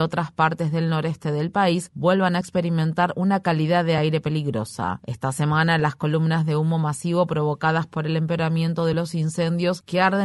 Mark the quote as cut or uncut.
uncut